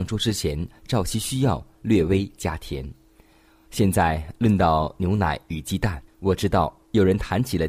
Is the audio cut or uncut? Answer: cut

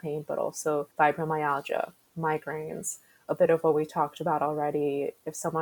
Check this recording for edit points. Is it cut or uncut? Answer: cut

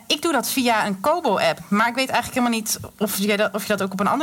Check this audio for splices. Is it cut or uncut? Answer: uncut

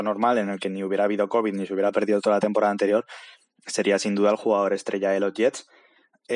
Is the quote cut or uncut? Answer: uncut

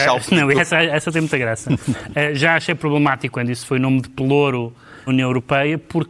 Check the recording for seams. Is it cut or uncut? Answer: cut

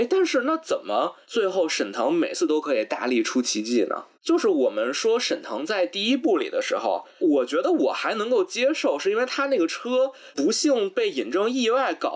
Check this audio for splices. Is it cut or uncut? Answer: cut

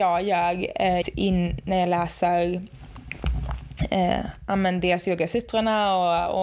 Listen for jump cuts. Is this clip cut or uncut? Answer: cut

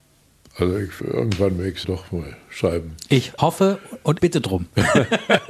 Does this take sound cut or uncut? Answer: cut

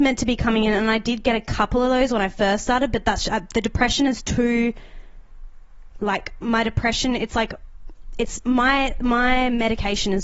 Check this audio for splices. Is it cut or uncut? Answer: uncut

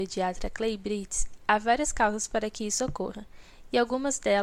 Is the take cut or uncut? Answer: uncut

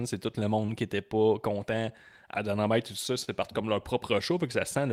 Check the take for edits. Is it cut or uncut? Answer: uncut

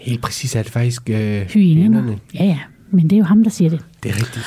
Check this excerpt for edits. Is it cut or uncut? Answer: uncut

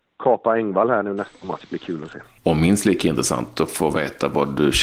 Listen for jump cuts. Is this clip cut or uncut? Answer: cut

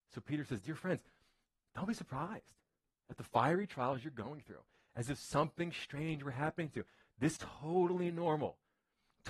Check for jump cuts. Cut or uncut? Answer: cut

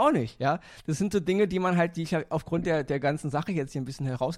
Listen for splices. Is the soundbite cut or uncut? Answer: uncut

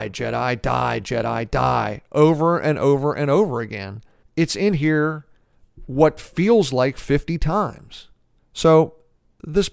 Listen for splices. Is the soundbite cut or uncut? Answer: cut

